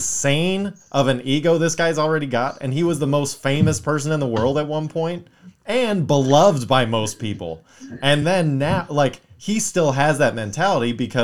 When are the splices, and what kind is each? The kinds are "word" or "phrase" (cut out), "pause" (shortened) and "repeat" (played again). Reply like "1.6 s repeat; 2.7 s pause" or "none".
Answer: none